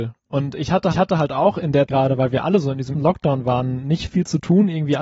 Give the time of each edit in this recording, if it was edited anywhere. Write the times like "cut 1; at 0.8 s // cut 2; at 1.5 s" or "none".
cut 1; at 0.9 s // cut 2; at 1.9 s // cut 3; at 2.9 s